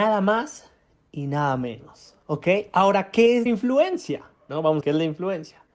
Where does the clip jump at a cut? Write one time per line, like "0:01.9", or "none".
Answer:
0:03.5
0:04.8